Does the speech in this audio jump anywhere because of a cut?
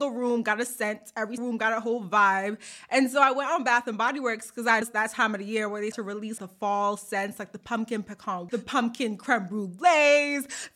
yes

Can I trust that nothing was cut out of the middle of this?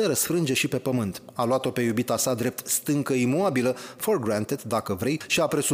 yes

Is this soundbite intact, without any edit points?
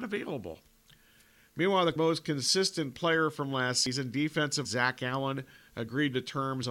no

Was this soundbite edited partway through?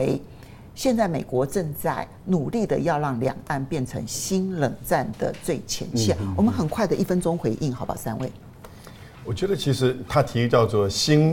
no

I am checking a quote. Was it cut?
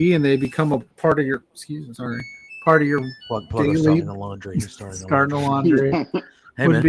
yes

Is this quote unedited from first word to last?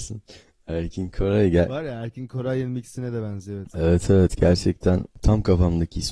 yes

